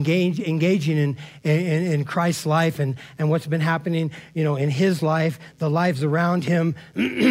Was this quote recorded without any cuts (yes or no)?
yes